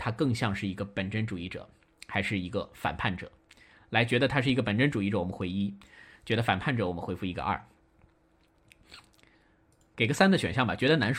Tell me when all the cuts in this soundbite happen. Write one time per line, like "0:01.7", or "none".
none